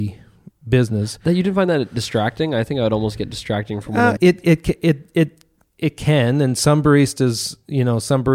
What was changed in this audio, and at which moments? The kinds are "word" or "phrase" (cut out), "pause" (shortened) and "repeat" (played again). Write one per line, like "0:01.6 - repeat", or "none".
0:04.2 - word